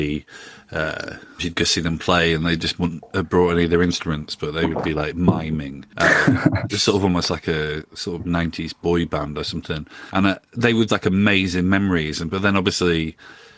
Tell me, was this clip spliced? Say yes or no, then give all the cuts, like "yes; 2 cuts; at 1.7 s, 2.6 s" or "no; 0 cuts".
yes; 3 cuts; at 1.4 s, 6.7 s, 10.9 s